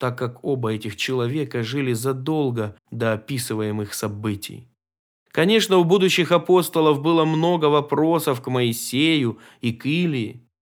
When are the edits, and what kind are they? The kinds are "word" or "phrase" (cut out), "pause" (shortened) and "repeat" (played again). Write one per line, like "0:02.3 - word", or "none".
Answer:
0:02.8 - pause
0:05.1 - pause

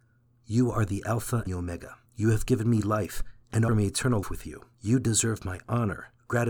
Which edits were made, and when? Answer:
0:01.5 - word
0:02.1 - pause
0:03.7 - word
0:04.2 - word
0:04.7 - pause

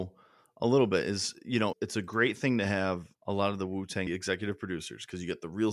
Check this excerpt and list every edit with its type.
0:01.7 - word
0:03.1 - pause
0:04.1 - phrase

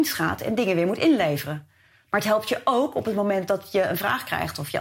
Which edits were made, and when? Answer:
none

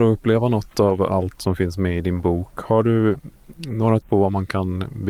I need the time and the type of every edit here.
0:01.4 - word
0:04.0 - word

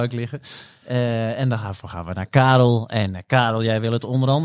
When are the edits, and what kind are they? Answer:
none

